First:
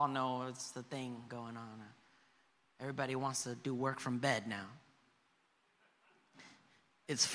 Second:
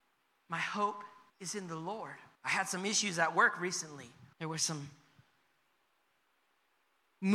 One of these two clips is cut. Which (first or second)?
second